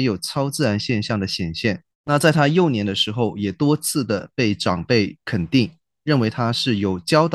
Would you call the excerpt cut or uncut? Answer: cut